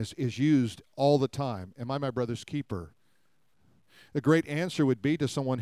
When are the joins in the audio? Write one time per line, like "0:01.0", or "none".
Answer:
none